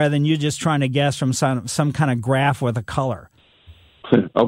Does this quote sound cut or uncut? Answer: uncut